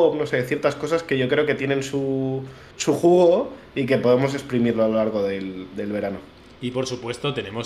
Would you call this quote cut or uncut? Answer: cut